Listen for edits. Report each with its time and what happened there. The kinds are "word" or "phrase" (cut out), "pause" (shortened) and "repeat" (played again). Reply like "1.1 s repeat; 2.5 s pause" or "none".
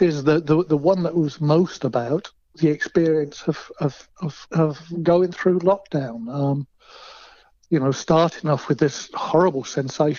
none